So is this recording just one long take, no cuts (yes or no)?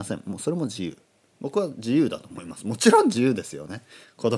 yes